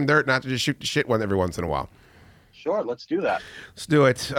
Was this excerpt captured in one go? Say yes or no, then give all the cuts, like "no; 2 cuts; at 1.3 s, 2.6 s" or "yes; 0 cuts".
yes; 0 cuts